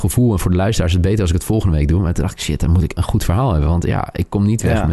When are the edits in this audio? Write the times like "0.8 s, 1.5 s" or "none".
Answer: 3.0 s